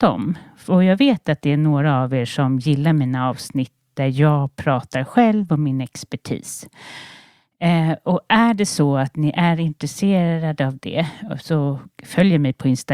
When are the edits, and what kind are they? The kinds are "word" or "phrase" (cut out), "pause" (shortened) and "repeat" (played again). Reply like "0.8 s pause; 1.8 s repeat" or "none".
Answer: none